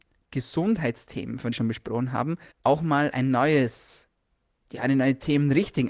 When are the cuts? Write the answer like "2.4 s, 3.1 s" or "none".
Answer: 1.5 s, 2.5 s